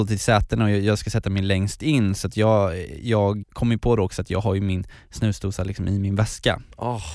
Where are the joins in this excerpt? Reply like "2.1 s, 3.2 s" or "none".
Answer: 3.4 s